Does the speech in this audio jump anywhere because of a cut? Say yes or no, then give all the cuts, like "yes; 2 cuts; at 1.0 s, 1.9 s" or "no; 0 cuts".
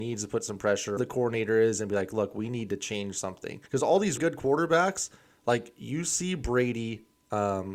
yes; 3 cuts; at 1.0 s, 3.7 s, 4.2 s